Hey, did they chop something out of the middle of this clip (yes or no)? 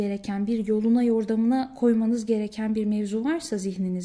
no